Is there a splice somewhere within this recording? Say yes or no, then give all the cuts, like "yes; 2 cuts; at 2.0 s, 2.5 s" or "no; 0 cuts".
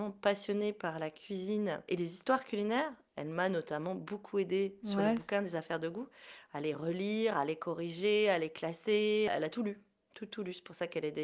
no; 0 cuts